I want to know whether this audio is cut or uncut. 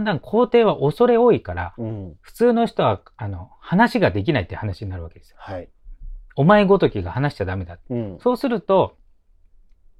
cut